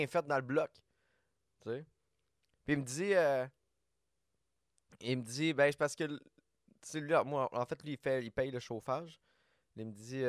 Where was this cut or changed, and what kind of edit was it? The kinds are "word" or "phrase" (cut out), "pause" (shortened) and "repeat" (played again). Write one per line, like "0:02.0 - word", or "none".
none